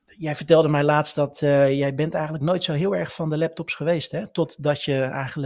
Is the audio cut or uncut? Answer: uncut